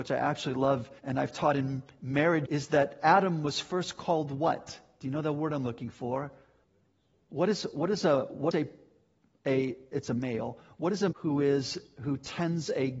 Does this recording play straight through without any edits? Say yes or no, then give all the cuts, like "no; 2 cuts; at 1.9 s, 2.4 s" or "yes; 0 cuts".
no; 5 cuts; at 1.0 s, 2.5 s, 6.6 s, 8.5 s, 11.1 s